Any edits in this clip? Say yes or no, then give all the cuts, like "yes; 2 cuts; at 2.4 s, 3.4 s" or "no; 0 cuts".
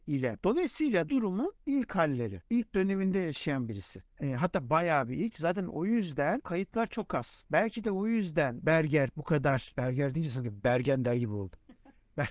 yes; 2 cuts; at 1.1 s, 6.4 s